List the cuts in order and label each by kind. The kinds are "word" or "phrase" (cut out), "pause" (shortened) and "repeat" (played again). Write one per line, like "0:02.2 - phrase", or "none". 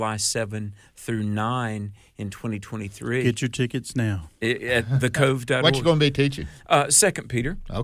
none